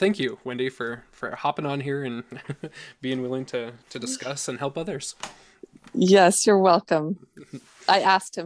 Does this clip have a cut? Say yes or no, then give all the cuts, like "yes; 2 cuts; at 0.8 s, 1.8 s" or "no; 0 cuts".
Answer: no; 0 cuts